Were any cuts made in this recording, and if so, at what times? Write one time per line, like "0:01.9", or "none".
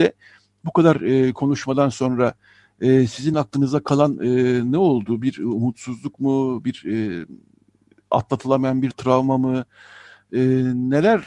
none